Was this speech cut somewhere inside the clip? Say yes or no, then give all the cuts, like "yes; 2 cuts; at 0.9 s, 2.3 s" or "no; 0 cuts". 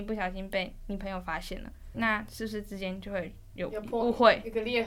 yes; 1 cut; at 1.9 s